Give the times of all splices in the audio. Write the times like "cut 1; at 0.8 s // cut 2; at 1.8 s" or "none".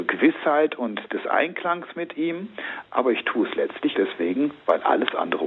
cut 1; at 3.9 s